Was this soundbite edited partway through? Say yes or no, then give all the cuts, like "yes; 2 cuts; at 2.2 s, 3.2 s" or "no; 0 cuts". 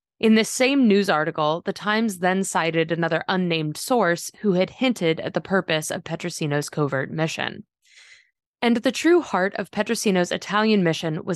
no; 0 cuts